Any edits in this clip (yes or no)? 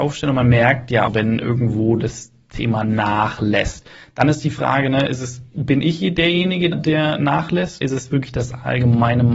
yes